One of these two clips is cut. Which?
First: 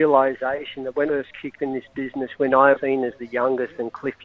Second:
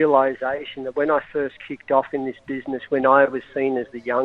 first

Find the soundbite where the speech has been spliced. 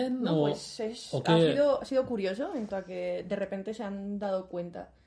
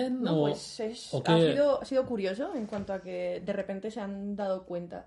first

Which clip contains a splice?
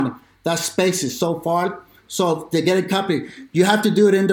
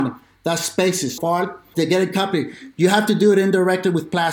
second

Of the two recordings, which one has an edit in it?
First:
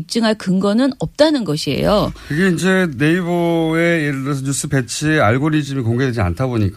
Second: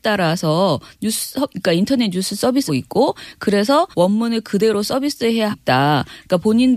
second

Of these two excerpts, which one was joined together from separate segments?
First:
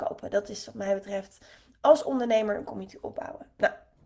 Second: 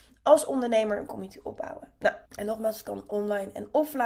second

